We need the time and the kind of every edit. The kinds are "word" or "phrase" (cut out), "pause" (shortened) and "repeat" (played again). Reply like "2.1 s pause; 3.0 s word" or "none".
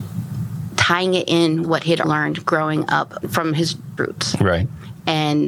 1.6 s word; 2.0 s word; 3.2 s word; 4.0 s word